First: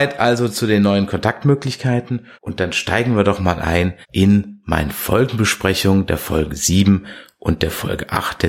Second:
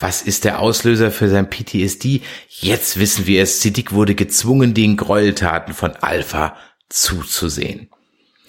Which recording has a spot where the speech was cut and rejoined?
first; 2 cuts; at 2.3 s, 4.0 s

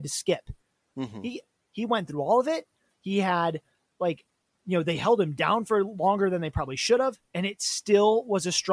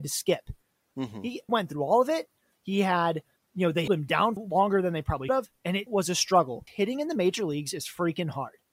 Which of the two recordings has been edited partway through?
second; 7 cuts; at 1.5 s, 3.4 s, 3.9 s, 4.4 s, 5.3 s, 5.9 s, 6.7 s

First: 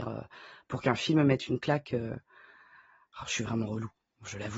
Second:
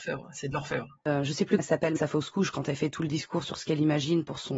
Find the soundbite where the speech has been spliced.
second; 2 cuts; at 1.6 s, 2.0 s

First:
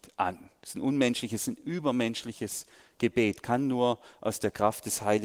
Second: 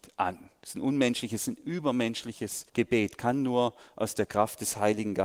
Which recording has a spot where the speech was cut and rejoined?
second; 1 cut; at 2.7 s

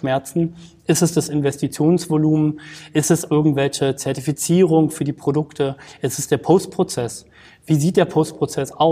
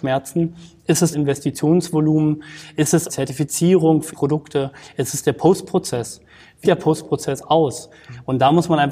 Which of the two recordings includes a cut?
second; 4 cuts; at 1.1 s, 3.1 s, 4.1 s, 6.6 s

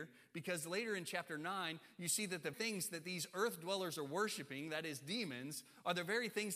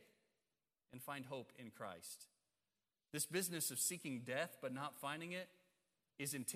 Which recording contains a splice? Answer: first; 1 cut; at 2.5 s

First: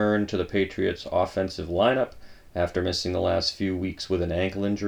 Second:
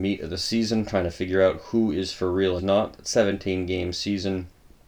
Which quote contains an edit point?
second; 1 cut; at 2.6 s

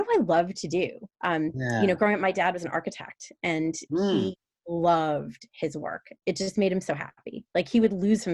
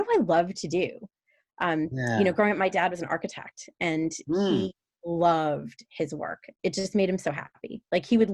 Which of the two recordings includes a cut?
first; 1 cut; at 1.1 s

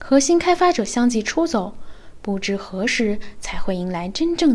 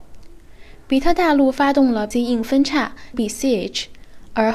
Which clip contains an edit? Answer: second; 2 cuts; at 2.1 s, 3.1 s

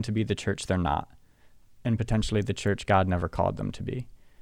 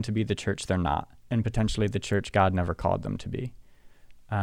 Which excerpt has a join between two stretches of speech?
second; 1 cut; at 1.2 s

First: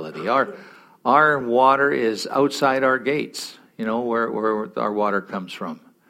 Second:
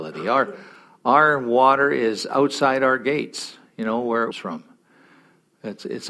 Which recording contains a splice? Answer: second; 1 cut; at 4.3 s

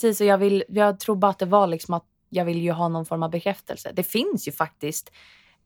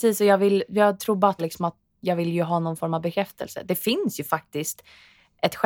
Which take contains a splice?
second; 1 cut; at 1.4 s

